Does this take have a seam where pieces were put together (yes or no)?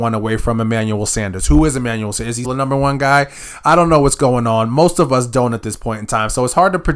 yes